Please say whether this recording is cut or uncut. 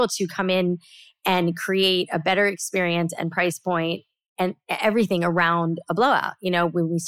uncut